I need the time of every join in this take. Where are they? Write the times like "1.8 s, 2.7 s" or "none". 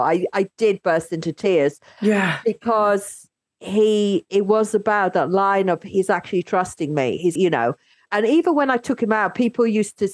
7.4 s, 8.1 s